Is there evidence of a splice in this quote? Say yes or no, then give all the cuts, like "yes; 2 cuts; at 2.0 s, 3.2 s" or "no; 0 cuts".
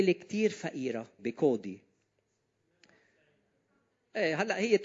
yes; 1 cut; at 1.2 s